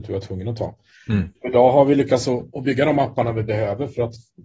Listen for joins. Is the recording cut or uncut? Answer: uncut